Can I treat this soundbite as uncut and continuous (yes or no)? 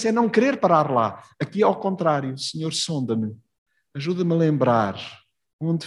yes